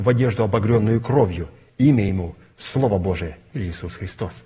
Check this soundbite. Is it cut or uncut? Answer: uncut